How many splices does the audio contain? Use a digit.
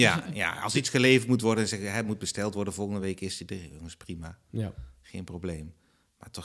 0